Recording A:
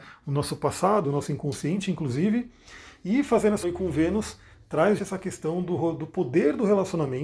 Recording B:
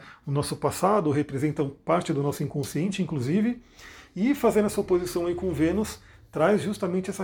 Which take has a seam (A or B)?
A